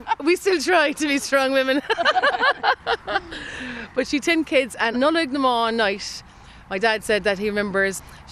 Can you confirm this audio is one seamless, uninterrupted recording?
no; 1 cut; at 4.9 s

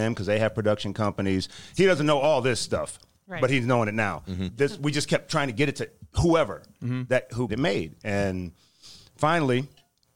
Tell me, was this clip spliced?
yes; 1 cut; at 7.5 s

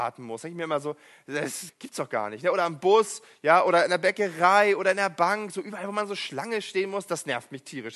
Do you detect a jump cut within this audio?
yes; 1 cut; at 1.7 s

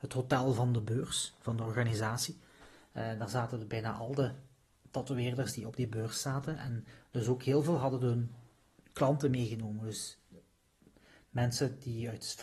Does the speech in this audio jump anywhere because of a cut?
no; 0 cuts

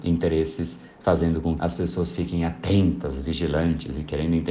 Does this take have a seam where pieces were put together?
yes; 1 cut; at 1.6 s

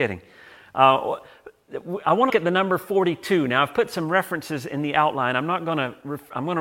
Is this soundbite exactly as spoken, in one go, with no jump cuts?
no; 1 cut; at 2.3 s

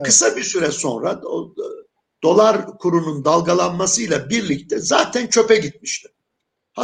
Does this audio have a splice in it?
no; 0 cuts

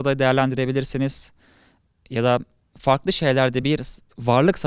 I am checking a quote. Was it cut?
no; 0 cuts

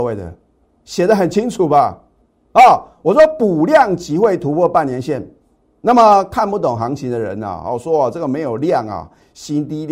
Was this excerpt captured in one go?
yes; 0 cuts

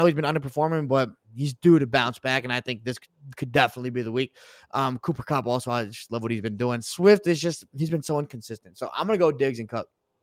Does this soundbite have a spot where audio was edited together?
no; 0 cuts

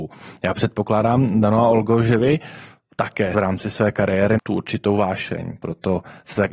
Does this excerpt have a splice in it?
yes; 2 cuts; at 3.3 s, 4.4 s

